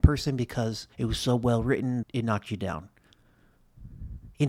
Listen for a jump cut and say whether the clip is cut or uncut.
cut